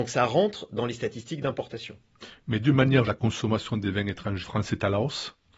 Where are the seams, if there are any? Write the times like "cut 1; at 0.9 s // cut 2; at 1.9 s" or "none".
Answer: cut 1; at 3.1 s // cut 2; at 4.4 s